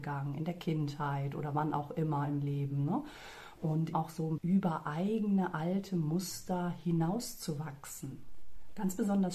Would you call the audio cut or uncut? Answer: cut